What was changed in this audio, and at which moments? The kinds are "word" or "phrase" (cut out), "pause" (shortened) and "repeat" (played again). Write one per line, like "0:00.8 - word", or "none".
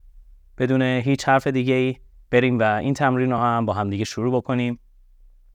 none